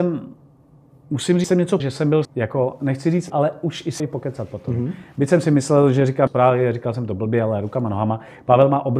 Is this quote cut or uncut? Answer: cut